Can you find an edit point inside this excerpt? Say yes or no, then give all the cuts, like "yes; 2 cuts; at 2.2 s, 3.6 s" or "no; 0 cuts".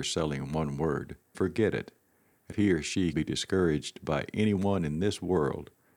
yes; 3 cuts; at 1.3 s, 2.5 s, 3.1 s